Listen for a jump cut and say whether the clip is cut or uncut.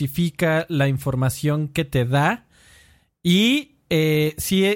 uncut